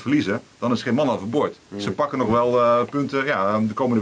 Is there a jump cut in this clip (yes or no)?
no